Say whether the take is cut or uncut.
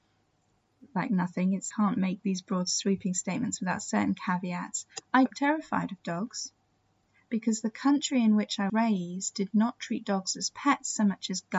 cut